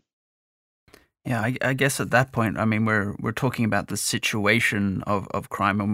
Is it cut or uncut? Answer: uncut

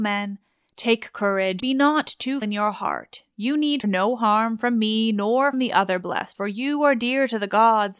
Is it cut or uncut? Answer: cut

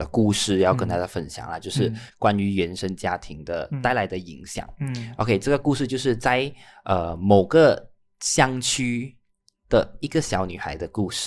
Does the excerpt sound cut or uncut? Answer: uncut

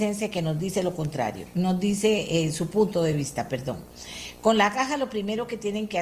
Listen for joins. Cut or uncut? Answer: uncut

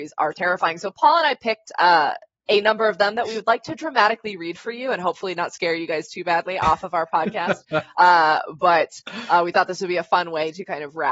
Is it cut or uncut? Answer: uncut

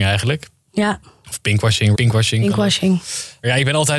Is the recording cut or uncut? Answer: cut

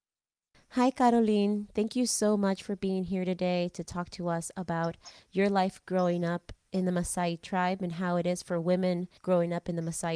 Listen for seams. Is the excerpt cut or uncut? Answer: cut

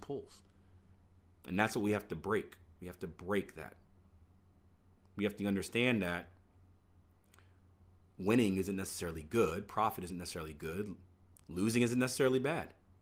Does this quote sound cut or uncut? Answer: uncut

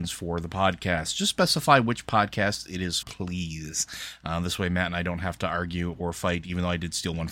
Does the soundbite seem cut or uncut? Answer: cut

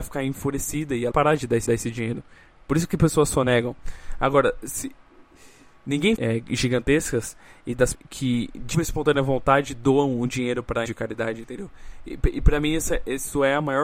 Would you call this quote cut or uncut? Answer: cut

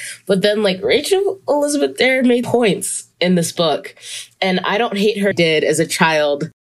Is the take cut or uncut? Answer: cut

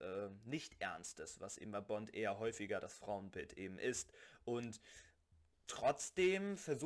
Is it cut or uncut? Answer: uncut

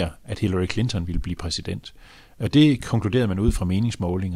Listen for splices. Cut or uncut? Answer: uncut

